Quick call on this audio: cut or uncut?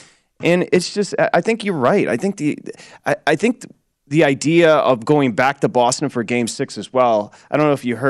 uncut